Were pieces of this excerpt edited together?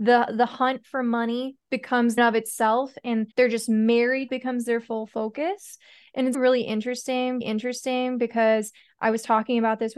yes; 5 cuts; at 2.2 s, 3.3 s, 4.3 s, 6.3 s, 7.4 s

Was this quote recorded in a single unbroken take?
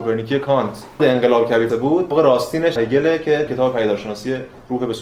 no; 5 cuts; at 1.0 s, 1.7 s, 2.1 s, 2.8 s, 3.5 s

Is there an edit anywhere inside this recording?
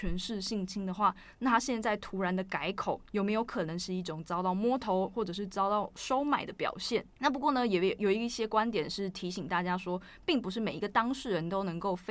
yes; 1 cut; at 7.1 s

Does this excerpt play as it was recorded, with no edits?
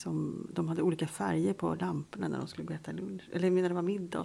yes; 0 cuts

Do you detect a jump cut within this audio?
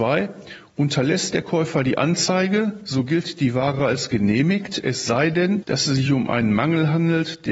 no; 0 cuts

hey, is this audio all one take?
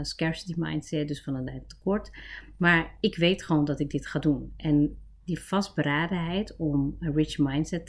yes; 0 cuts

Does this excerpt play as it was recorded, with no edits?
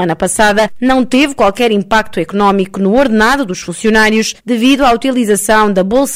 no; 1 cut; at 4.4 s

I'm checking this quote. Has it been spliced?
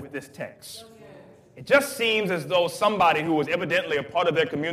no; 0 cuts

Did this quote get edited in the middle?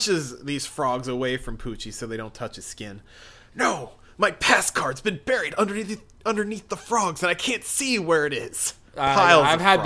no; 0 cuts

